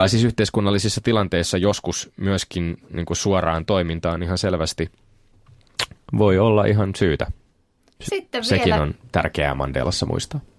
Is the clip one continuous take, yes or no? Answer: yes